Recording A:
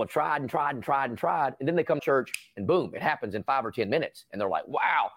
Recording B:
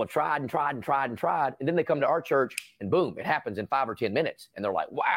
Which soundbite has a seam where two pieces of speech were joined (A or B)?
A